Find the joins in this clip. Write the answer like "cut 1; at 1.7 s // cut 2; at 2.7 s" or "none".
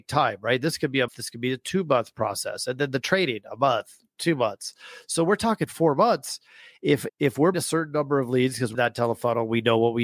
cut 1; at 1.1 s // cut 2; at 7.1 s // cut 3; at 7.5 s // cut 4; at 8.7 s